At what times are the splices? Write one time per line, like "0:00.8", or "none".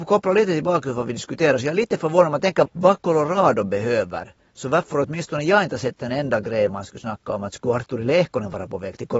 0:02.7
0:06.7